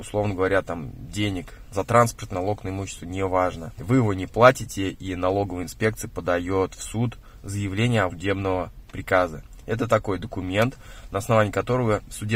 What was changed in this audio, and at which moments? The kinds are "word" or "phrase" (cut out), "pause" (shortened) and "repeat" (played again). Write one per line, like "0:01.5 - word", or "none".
0:01.7 - word
0:02.3 - word
0:08.1 - word